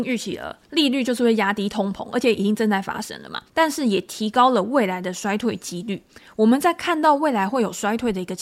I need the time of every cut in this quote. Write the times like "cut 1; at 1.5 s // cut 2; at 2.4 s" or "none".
cut 1; at 3.5 s